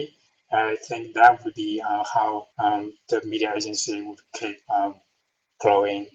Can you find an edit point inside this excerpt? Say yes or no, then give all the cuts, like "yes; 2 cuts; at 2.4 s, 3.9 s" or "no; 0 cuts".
yes; 1 cut; at 2.5 s